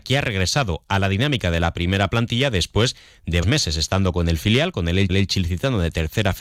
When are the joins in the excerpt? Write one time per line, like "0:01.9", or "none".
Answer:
0:03.4
0:05.1